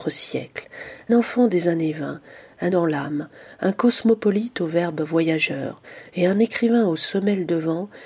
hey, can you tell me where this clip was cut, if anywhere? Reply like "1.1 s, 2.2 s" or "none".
1.1 s, 2.7 s